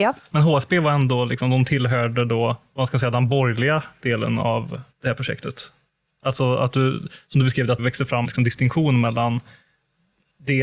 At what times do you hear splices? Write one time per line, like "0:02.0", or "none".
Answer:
0:04.9
0:07.8
0:08.2